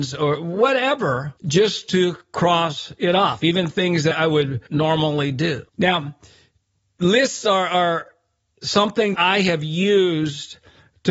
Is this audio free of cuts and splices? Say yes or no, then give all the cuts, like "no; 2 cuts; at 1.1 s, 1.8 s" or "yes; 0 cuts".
no; 5 cuts; at 1.4 s, 4.1 s, 4.7 s, 5.7 s, 9.1 s